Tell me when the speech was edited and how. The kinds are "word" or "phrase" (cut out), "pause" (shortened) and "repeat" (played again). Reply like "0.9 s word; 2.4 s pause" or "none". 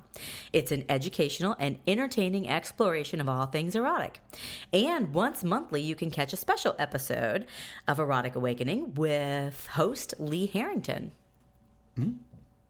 none